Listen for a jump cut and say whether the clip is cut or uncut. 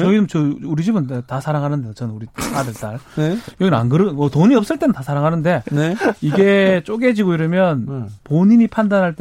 uncut